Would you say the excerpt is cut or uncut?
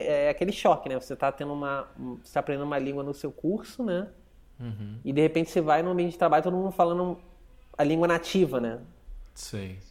uncut